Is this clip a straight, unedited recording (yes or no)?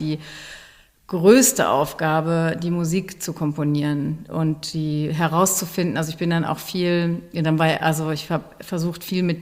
yes